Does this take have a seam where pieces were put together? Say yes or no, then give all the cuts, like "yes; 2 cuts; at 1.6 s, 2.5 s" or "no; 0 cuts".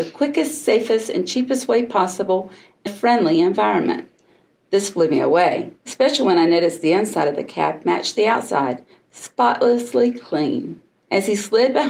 yes; 3 cuts; at 2.9 s, 5.8 s, 11.0 s